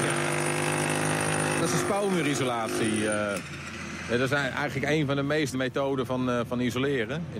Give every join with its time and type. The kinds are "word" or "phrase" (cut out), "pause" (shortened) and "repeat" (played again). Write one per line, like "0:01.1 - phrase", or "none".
0:05.5 - word